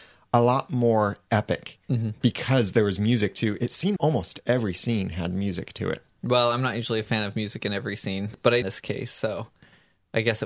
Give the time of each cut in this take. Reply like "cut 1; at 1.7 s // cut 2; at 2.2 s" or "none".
cut 1; at 4.0 s // cut 2; at 8.6 s